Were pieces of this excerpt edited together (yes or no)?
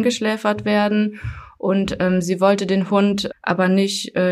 yes